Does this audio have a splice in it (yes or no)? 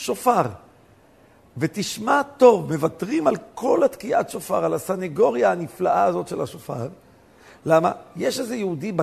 no